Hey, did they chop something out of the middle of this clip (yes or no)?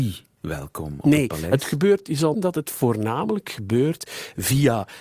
yes